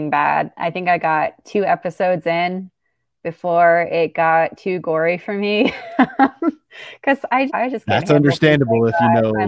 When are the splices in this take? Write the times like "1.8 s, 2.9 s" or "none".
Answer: 7.5 s